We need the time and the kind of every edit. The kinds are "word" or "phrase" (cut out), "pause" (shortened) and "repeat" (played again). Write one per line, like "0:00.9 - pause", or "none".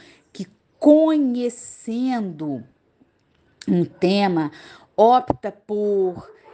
none